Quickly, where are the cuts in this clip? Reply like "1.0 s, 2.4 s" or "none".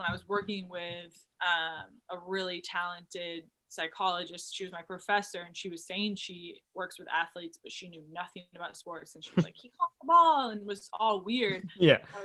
1.3 s, 6.6 s